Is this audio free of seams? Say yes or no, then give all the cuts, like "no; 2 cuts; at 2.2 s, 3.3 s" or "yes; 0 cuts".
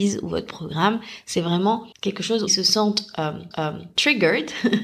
no; 3 cuts; at 1.9 s, 2.5 s, 3.5 s